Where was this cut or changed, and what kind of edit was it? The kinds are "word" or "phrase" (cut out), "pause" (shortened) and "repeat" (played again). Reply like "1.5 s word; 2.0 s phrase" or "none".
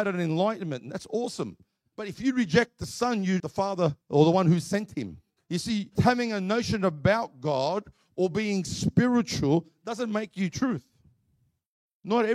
3.4 s word; 4.0 s pause; 5.4 s pause; 5.9 s word